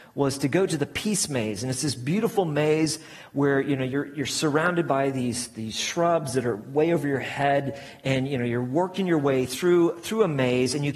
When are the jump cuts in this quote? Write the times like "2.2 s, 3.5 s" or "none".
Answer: none